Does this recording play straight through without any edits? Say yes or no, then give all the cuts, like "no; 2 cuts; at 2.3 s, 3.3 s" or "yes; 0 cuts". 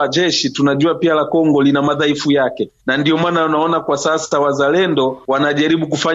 yes; 0 cuts